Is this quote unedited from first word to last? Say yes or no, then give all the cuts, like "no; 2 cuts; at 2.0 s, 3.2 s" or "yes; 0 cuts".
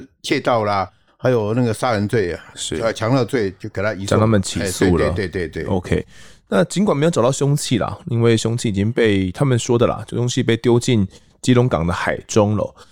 yes; 0 cuts